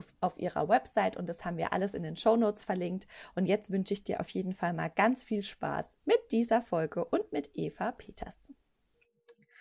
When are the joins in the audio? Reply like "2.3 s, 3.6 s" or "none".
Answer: none